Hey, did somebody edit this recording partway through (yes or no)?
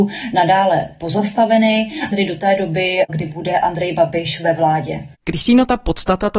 yes